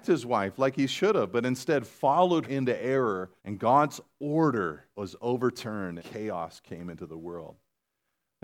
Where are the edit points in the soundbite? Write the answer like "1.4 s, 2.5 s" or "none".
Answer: 2.4 s, 3.4 s, 4.9 s, 6.0 s